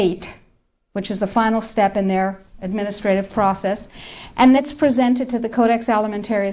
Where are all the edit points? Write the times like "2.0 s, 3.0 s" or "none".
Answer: 4.6 s